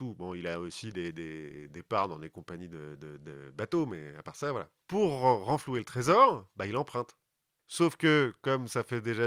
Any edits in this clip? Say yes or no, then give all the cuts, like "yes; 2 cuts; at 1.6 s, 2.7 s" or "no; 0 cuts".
no; 0 cuts